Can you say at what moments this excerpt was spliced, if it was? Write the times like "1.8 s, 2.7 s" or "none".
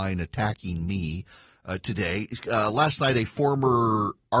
none